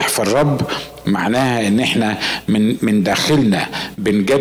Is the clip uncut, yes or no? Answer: yes